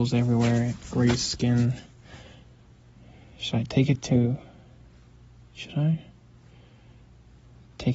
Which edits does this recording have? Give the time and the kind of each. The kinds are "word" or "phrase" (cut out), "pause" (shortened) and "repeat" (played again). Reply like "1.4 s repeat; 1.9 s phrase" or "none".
none